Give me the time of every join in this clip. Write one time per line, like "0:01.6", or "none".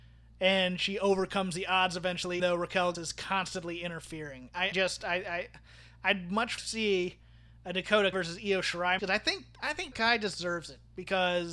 0:02.4
0:02.9
0:04.7
0:06.6
0:08.1
0:09.0
0:09.9